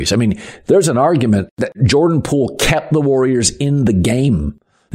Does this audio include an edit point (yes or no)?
no